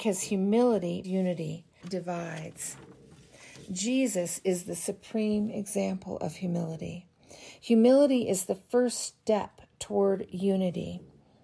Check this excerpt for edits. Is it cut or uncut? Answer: cut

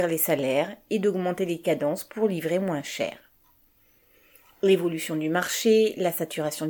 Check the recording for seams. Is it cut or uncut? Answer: uncut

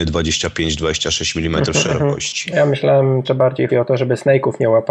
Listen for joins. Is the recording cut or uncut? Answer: cut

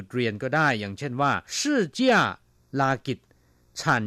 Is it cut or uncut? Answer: cut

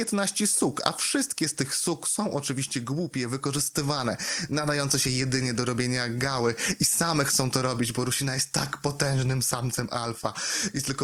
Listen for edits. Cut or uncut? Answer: uncut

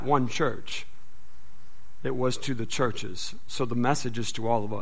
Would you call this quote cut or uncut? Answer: uncut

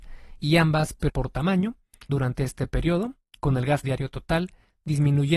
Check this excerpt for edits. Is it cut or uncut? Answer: cut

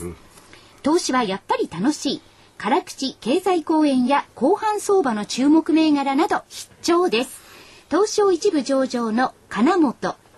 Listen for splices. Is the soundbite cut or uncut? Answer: uncut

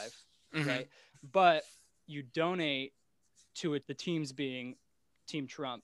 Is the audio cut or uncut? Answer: cut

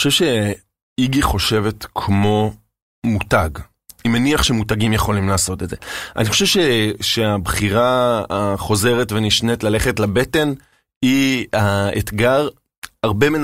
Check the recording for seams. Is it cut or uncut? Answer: cut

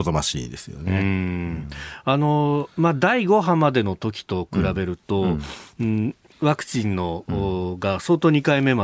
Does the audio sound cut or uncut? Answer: cut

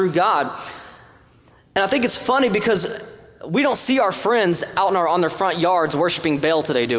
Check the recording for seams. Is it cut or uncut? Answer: uncut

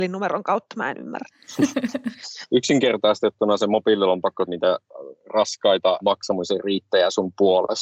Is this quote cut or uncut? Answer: cut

